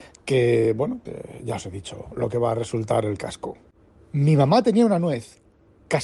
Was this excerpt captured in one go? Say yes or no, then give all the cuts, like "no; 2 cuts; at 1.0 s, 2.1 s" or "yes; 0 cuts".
no; 1 cut; at 1.1 s